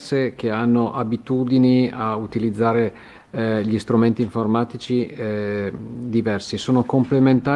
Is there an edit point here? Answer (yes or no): no